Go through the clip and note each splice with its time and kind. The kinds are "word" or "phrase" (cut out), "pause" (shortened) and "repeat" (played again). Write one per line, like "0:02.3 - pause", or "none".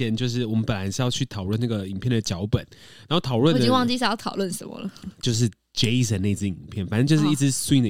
none